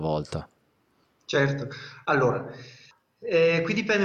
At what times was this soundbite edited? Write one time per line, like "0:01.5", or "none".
0:02.9